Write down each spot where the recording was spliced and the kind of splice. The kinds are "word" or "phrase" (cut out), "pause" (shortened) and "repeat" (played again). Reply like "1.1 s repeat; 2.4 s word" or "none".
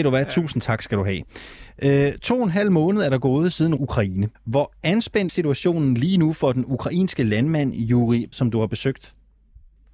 3.8 s phrase; 4.3 s pause; 5.3 s word; 8.3 s word